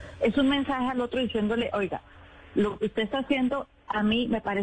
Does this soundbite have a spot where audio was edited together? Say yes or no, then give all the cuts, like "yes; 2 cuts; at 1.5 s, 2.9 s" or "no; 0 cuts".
no; 0 cuts